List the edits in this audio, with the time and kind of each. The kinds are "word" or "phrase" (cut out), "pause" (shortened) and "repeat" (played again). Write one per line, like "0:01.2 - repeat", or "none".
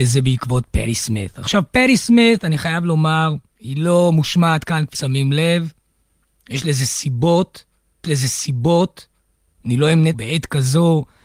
0:03.5 - pause
0:04.9 - word
0:08.0 - repeat
0:10.1 - phrase